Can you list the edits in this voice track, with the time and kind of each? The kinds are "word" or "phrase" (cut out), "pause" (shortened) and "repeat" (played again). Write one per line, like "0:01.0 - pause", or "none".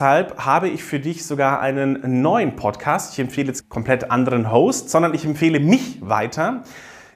0:03.6 - word